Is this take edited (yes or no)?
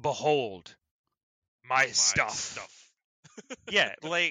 no